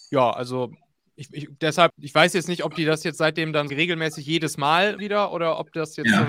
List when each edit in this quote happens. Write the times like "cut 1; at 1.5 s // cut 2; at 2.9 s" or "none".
cut 1; at 1.9 s // cut 2; at 3.7 s // cut 3; at 5.0 s